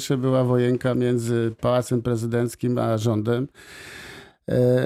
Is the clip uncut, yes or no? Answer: yes